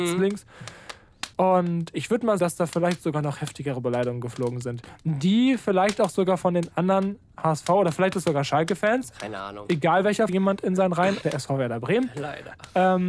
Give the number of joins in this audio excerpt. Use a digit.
4